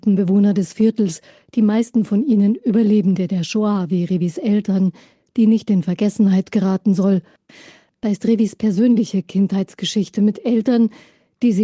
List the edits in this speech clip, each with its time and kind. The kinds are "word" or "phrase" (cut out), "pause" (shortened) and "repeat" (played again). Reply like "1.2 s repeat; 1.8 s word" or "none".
none